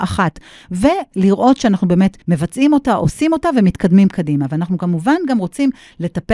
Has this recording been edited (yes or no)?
yes